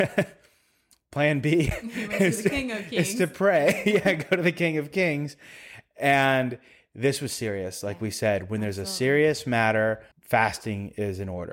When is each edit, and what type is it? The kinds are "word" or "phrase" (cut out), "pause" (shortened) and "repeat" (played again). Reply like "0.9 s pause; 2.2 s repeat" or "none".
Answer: 10.1 s pause